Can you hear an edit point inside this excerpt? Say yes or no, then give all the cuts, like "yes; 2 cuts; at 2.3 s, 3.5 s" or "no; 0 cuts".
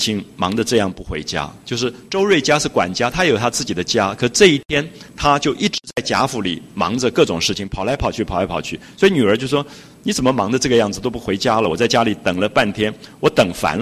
yes; 1 cut; at 5.1 s